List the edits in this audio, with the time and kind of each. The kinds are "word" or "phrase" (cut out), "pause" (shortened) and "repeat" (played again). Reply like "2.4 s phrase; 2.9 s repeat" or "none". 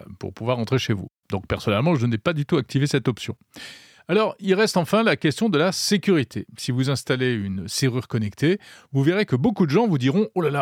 none